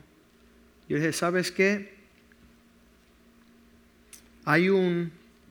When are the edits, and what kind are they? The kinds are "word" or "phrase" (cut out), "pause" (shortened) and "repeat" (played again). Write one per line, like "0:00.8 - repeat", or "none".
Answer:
none